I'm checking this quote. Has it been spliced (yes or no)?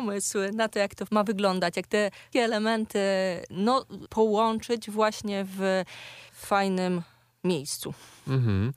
yes